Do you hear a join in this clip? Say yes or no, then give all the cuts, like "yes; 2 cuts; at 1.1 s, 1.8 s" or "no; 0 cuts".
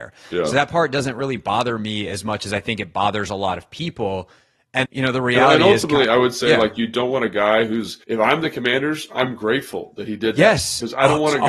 yes; 2 cuts; at 4.8 s, 8.0 s